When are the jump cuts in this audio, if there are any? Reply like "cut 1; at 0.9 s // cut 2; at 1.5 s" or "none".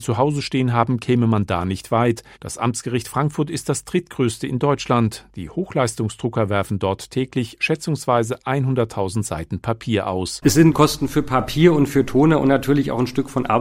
cut 1; at 2.3 s